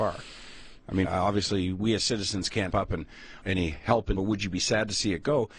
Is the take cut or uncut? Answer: cut